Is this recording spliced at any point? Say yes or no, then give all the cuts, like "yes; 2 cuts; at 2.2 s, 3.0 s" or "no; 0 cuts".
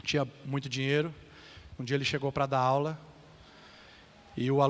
no; 0 cuts